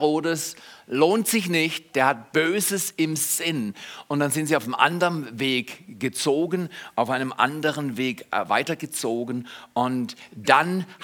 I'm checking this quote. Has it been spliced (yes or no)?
no